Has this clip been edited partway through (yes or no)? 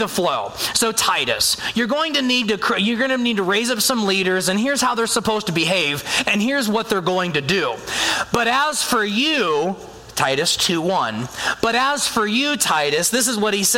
no